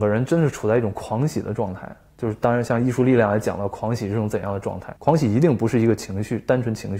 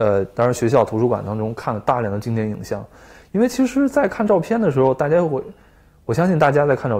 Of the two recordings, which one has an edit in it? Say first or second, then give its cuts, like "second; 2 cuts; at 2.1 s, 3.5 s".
first; 1 cut; at 5.0 s